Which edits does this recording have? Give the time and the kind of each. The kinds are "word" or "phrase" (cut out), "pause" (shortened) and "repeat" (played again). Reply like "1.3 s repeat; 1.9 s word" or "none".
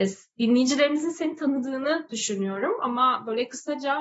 none